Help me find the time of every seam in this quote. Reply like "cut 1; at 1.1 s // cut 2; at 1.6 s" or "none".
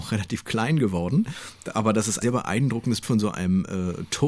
cut 1; at 2.2 s // cut 2; at 3.0 s